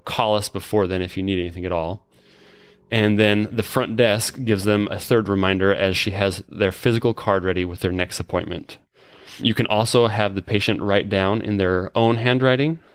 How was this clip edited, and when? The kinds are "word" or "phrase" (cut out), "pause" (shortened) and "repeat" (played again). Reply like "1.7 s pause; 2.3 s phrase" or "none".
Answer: none